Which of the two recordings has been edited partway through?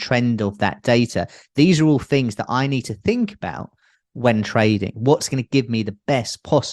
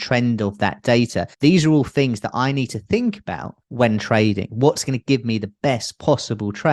second; 2 cuts; at 1.3 s, 3.6 s

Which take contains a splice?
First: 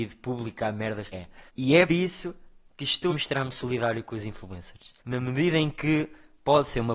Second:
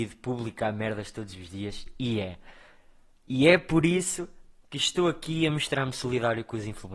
first; 5 cuts; at 1.1 s, 1.5 s, 1.9 s, 3.1 s, 5.0 s

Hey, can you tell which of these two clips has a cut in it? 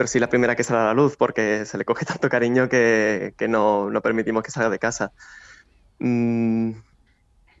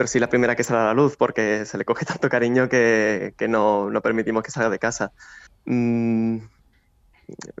second; 1 cut; at 5.5 s

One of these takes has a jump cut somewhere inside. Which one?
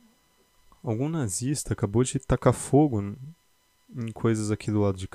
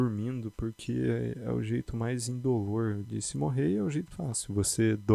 second; 2 cuts; at 3.0 s, 4.1 s

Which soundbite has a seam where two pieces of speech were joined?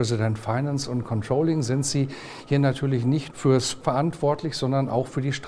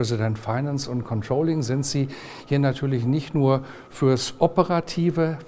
first; 2 cuts; at 3.3 s, 3.8 s

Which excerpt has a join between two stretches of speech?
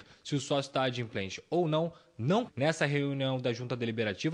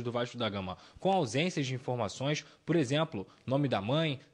first; 1 cut; at 2.5 s

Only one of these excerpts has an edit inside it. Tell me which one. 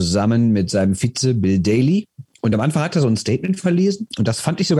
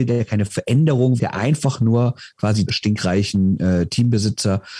second; 2 cuts; at 1.2 s, 2.7 s

